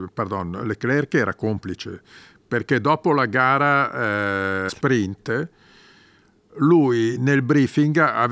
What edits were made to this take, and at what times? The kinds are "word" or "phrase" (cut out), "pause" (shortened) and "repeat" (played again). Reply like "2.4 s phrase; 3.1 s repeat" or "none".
4.7 s word